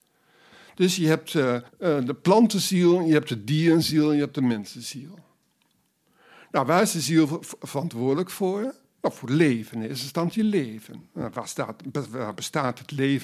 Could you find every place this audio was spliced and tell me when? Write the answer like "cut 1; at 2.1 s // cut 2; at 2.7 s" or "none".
cut 1; at 1.7 s